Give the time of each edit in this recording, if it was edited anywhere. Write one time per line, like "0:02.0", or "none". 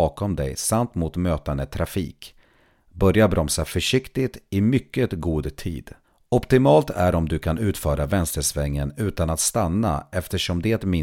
0:06.0